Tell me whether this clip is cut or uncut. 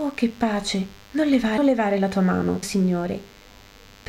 cut